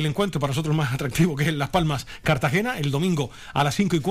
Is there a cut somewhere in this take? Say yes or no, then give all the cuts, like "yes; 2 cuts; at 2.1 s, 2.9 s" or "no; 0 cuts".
no; 0 cuts